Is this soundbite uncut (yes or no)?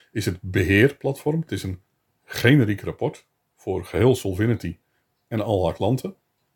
yes